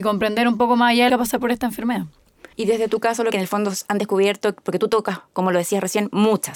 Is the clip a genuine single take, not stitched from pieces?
no; 4 cuts; at 1.1 s, 2.5 s, 3.3 s, 5.3 s

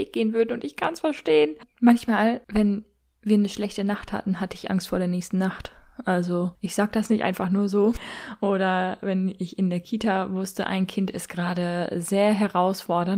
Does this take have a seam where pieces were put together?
no; 0 cuts

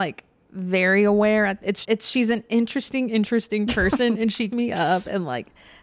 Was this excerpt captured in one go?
no; 2 cuts; at 1.8 s, 4.5 s

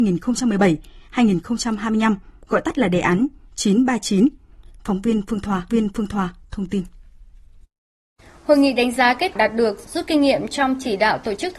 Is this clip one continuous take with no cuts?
no; 2 cuts; at 5.7 s, 9.4 s

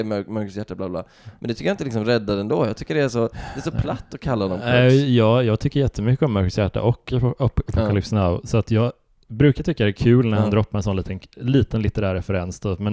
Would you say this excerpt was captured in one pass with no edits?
yes; 0 cuts

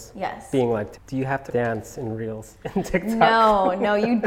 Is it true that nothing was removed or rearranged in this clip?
no; 2 cuts; at 0.9 s, 1.5 s

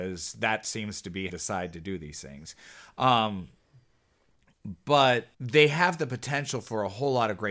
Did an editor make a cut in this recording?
yes; 2 cuts; at 1.3 s, 5.3 s

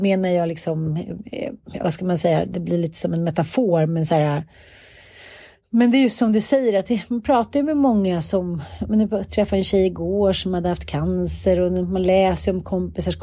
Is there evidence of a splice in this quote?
no; 0 cuts

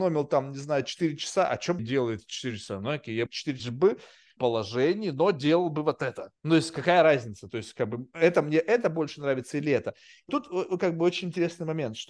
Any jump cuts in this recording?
yes; 6 cuts; at 1.8 s, 3.3 s, 3.6 s, 4.4 s, 6.4 s, 10.3 s

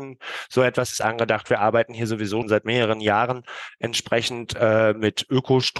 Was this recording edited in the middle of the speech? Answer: yes; 1 cut; at 2.4 s

